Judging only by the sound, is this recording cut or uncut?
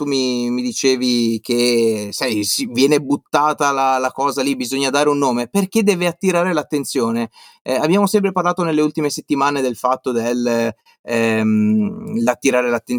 uncut